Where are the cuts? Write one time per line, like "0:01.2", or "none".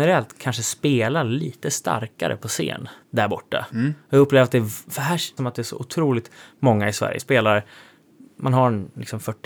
0:03.0
0:05.4
0:07.2